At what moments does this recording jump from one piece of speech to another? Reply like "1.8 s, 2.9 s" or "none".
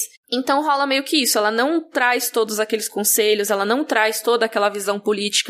none